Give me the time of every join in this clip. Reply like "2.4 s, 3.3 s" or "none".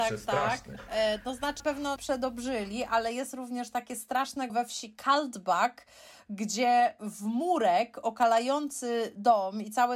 1.6 s, 2.0 s, 4.5 s